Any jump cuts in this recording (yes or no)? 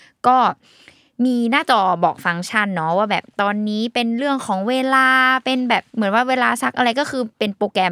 yes